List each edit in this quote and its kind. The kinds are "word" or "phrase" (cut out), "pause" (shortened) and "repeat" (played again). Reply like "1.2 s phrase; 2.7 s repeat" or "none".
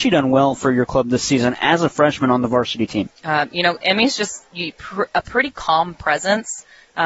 none